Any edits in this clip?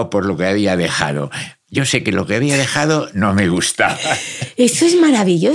no; 0 cuts

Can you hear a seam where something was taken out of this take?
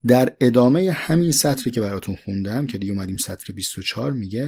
no; 0 cuts

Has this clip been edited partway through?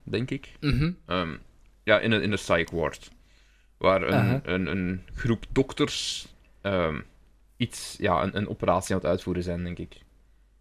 no; 0 cuts

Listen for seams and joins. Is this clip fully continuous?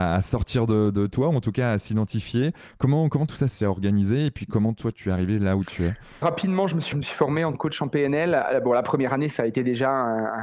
no; 5 cuts; at 3.5 s, 4.9 s, 6.2 s, 6.9 s, 7.5 s

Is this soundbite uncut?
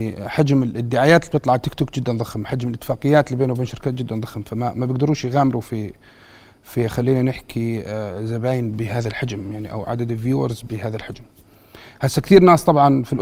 yes; 0 cuts

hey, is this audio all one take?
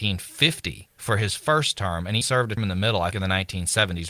no; 3 cuts; at 2.2 s, 2.6 s, 3.1 s

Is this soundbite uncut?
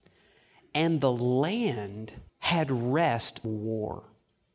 no; 2 cuts; at 2.3 s, 3.4 s

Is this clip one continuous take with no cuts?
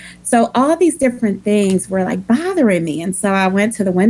yes; 0 cuts

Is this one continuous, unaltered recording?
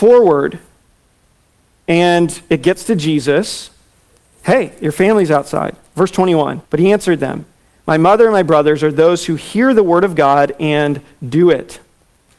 no; 1 cut; at 6.6 s

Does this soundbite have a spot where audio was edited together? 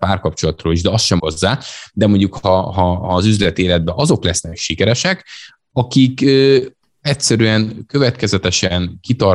yes; 1 cut; at 1.2 s

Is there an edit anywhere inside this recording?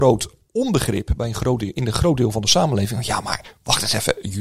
no; 0 cuts

